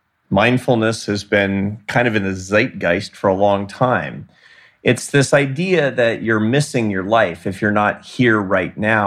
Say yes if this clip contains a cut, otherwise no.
no